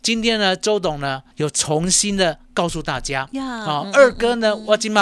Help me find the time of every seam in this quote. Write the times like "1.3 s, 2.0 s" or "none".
1.3 s

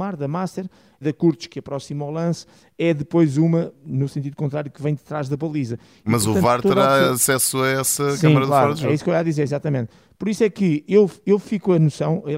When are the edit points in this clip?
1.0 s

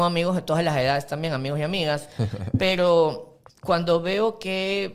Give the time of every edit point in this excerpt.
3.5 s

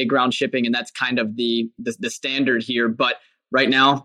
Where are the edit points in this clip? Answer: none

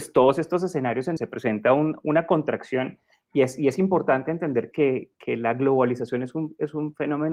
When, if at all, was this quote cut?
1.2 s, 4.7 s

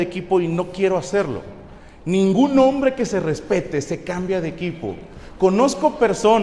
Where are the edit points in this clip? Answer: none

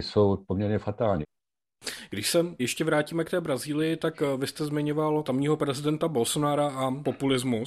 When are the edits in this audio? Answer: none

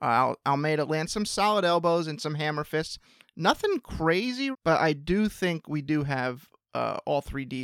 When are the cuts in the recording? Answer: 4.5 s

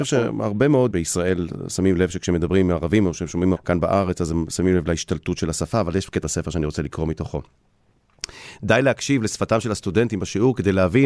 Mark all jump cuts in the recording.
0.9 s, 3.6 s, 6.2 s

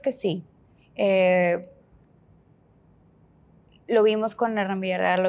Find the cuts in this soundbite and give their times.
none

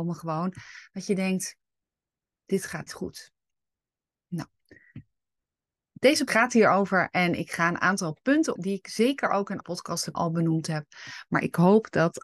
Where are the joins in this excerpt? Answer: 2.9 s, 6.3 s, 8.6 s, 9.6 s, 10.1 s

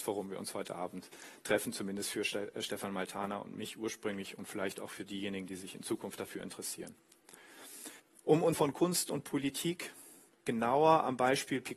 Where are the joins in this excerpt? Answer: 8.0 s, 8.5 s

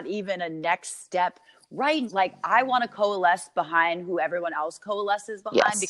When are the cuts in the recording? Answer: 2.1 s

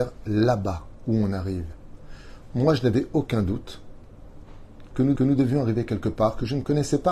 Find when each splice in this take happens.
5.2 s

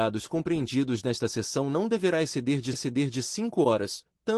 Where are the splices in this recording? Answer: 2.7 s

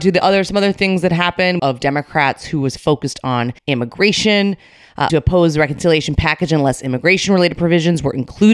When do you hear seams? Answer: 1.6 s, 3.6 s, 5.1 s

